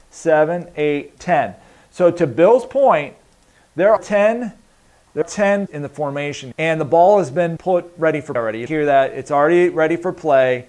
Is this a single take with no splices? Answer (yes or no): no